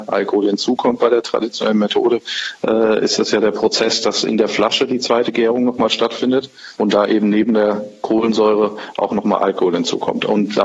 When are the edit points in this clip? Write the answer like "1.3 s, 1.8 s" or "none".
6.7 s